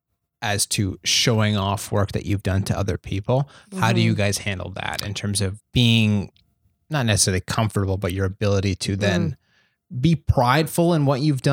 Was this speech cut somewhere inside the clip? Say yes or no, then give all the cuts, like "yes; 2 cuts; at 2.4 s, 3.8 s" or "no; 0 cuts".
no; 0 cuts